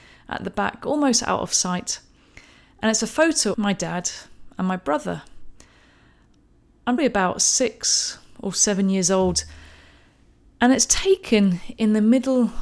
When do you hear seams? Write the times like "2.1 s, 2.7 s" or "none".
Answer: 3.5 s, 7.0 s